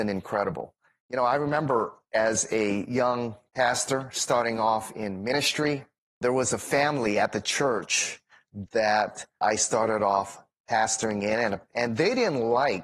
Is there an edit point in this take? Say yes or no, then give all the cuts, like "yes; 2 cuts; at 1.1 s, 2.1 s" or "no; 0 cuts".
no; 0 cuts